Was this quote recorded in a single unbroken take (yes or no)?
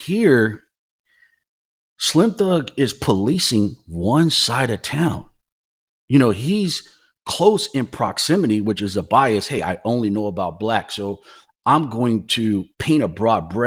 yes